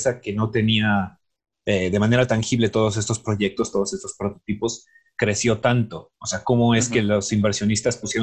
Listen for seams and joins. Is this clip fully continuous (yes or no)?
yes